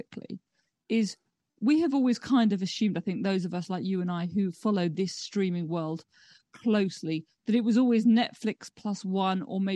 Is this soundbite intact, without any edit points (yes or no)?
yes